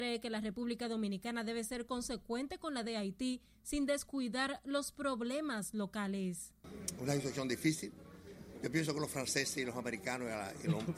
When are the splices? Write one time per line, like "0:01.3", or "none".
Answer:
0:02.8